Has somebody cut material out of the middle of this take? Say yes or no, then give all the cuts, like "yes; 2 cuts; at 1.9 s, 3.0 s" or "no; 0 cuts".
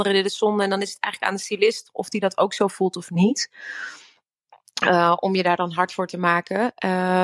no; 0 cuts